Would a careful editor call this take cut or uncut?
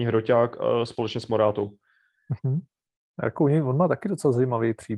uncut